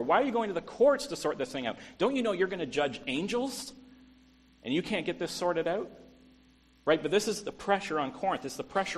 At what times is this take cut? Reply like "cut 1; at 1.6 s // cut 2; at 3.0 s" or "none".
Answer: none